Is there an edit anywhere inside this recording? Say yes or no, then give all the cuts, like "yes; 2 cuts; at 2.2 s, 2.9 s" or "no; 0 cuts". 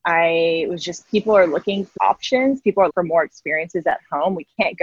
yes; 3 cuts; at 1.0 s, 2.0 s, 2.9 s